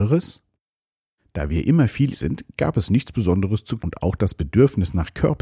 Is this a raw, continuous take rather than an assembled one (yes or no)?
no